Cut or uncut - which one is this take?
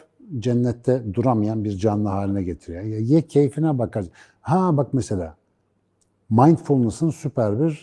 uncut